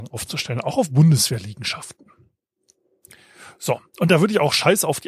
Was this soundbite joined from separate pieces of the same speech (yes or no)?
no